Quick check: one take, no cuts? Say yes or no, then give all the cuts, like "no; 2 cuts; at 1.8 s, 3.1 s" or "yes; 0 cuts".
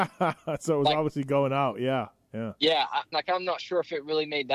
no; 1 cut; at 3.1 s